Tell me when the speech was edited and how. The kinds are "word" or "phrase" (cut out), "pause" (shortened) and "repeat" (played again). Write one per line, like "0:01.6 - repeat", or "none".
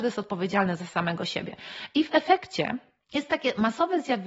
0:03.0 - pause